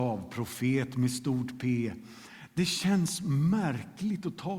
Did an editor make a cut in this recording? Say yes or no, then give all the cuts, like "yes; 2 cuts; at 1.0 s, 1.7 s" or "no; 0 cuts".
no; 0 cuts